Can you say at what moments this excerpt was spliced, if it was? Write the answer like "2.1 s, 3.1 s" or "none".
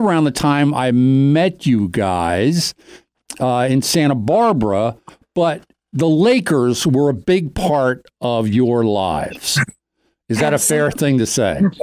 none